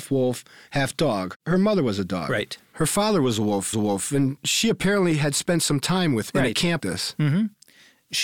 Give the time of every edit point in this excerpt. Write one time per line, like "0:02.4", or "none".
0:03.7
0:06.3
0:06.8